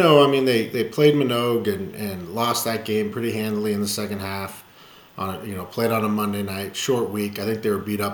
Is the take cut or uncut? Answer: uncut